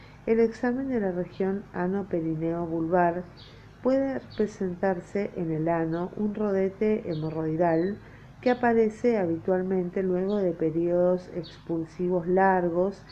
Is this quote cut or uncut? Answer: uncut